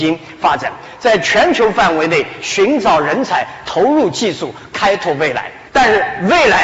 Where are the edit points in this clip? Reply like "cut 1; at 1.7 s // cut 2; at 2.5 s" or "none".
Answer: cut 1; at 5.7 s